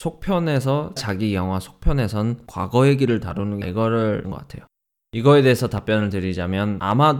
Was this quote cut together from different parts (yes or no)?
yes